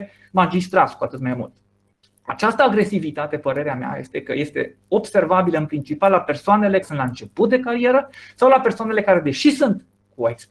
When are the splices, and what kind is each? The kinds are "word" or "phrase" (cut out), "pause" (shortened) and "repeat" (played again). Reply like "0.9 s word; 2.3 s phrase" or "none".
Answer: 6.8 s word